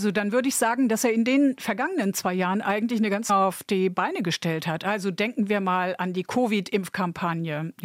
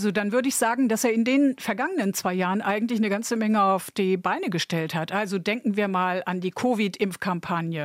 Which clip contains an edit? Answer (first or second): first